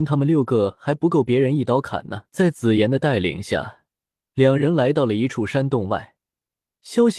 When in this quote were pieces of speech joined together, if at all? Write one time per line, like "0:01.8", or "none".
0:02.3